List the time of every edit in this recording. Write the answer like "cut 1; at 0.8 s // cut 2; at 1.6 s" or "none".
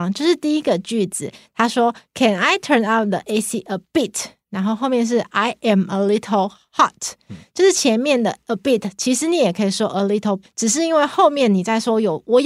cut 1; at 10.4 s